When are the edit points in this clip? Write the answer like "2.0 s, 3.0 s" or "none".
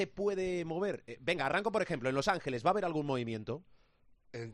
none

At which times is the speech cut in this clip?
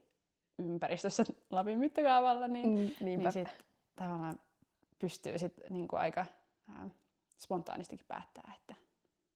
none

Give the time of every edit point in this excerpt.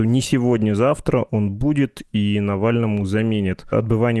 none

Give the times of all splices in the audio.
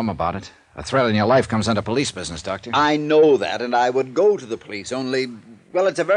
none

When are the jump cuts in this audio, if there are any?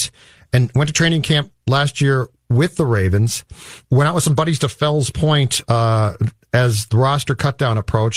3.8 s

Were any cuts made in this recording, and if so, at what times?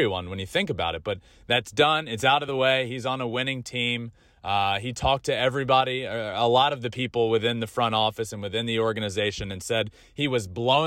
none

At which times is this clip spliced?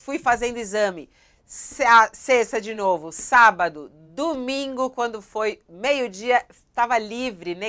none

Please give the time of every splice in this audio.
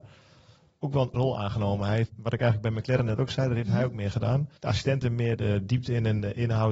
1.1 s, 2.1 s, 4.6 s, 5.4 s

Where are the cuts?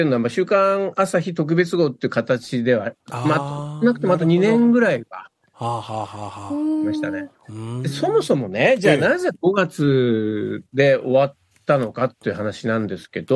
3.0 s, 10.7 s

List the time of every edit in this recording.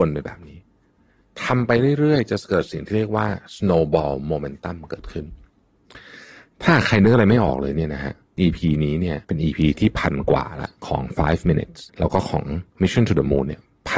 8.4 s, 9.2 s, 11.9 s

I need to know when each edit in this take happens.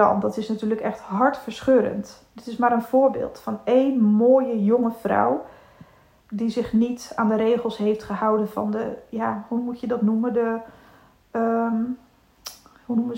6.2 s

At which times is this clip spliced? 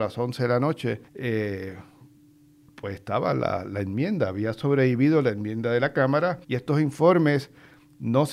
1.1 s, 6.4 s

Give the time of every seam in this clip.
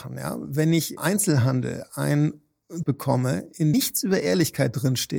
1.0 s, 2.8 s, 3.7 s

